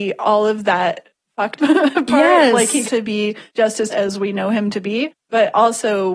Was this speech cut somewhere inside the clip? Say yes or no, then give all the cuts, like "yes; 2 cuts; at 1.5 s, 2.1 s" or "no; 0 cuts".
yes; 4 cuts; at 1.6 s, 2.8 s, 3.5 s, 3.9 s